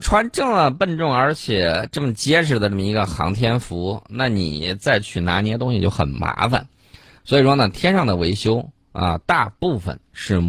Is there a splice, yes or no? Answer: no